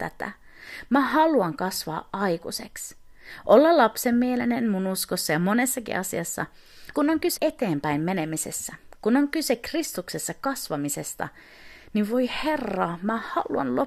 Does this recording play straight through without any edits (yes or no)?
no